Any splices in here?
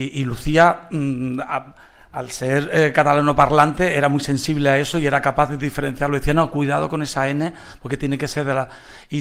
no; 0 cuts

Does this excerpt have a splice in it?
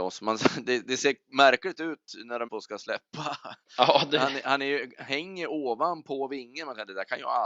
yes; 1 cut; at 2.5 s

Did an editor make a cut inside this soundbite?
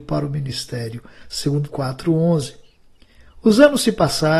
yes; 1 cut; at 1.7 s

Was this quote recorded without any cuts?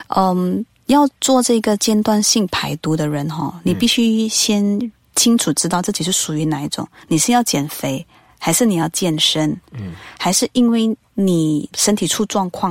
yes; 0 cuts

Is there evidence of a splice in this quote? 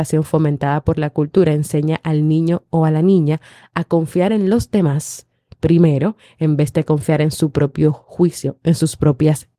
no; 0 cuts

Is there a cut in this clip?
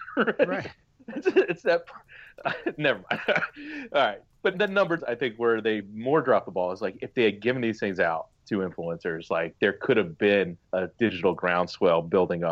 yes; 4 cuts; at 4.5 s, 5.0 s, 5.8 s, 10.6 s

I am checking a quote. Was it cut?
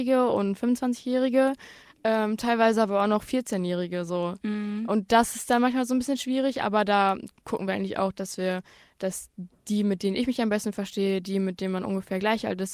no; 0 cuts

